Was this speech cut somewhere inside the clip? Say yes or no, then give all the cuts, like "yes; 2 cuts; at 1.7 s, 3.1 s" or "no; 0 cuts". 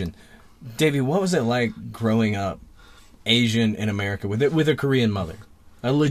no; 0 cuts